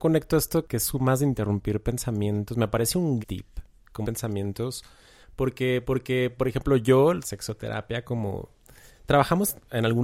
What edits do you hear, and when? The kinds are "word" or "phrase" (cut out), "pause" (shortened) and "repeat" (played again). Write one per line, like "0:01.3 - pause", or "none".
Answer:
0:03.2 - word
0:04.0 - word
0:05.8 - repeat
0:07.2 - phrase